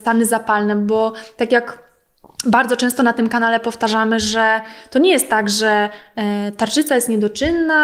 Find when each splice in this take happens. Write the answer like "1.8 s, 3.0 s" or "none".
none